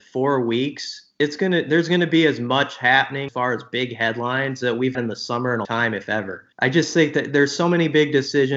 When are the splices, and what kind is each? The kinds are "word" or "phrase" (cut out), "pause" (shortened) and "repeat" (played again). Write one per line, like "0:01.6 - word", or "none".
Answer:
0:03.3 - word
0:04.9 - word
0:05.6 - word
0:06.5 - pause